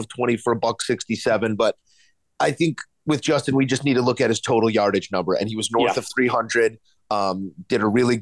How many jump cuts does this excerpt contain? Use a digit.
0